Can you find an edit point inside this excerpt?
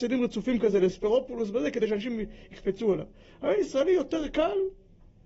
no; 0 cuts

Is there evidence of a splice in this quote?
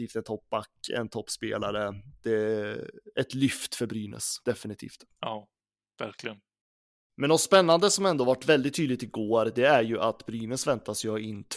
yes; 1 cut; at 4.4 s

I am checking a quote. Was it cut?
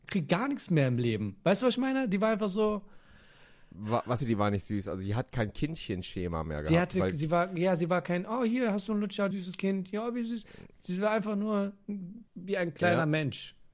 yes; 3 cuts; at 4.2 s, 9.3 s, 12.3 s

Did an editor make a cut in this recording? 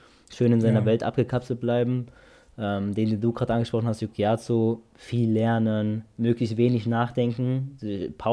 no; 0 cuts

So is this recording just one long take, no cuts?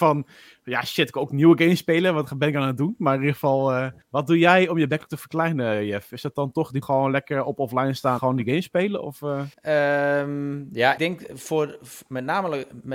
no; 5 cuts; at 4.0 s, 6.8 s, 8.2 s, 9.5 s, 11.0 s

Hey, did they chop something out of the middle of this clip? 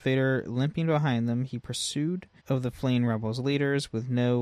yes; 1 cut; at 2.4 s

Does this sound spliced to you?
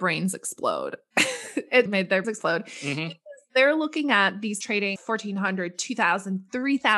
yes; 4 cuts; at 1.9 s, 2.2 s, 4.6 s, 5.0 s

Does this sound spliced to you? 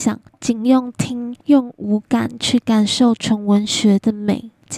yes; 1 cut; at 1.4 s

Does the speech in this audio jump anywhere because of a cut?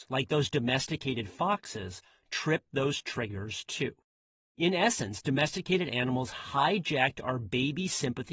no; 0 cuts

